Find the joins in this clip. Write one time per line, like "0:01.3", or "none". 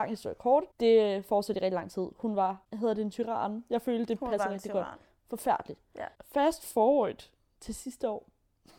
none